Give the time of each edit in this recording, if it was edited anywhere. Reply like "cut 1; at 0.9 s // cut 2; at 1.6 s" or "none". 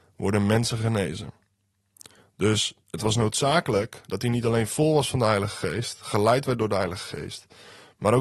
cut 1; at 2.8 s // cut 2; at 4.0 s